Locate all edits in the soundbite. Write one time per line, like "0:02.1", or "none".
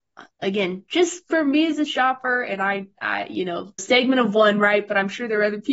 0:03.8